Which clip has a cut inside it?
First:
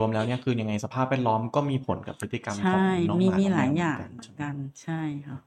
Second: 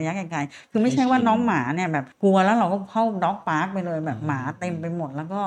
second; 1 cut; at 2.1 s

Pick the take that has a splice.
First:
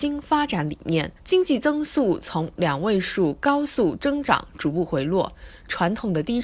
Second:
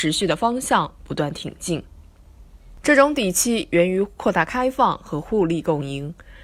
first; 1 cut; at 1.2 s

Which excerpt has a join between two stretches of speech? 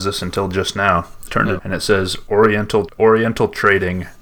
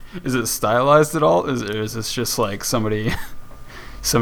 first; 3 cuts; at 1.3 s, 1.6 s, 2.9 s

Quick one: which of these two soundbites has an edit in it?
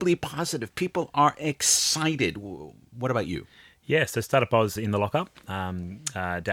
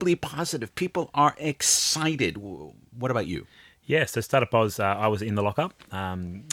first; 1 cut; at 4.8 s

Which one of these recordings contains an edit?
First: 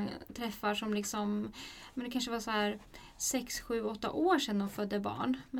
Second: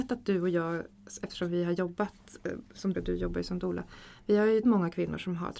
second; 2 cuts; at 2.9 s, 4.6 s

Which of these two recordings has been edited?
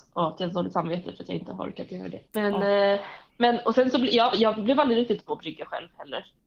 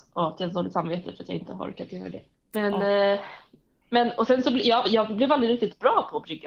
first; 3 cuts; at 2.3 s, 3.3 s, 5.3 s

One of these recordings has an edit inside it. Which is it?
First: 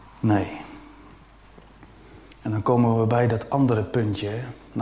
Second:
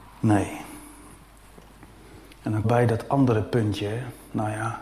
second; 1 cut; at 2.6 s

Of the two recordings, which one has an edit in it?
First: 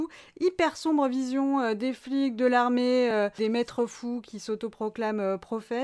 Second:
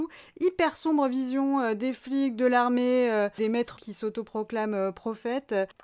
second; 1 cut; at 3.8 s

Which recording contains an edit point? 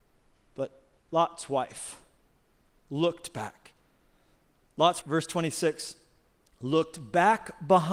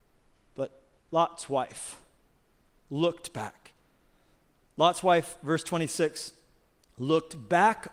first; 1 cut; at 5.0 s

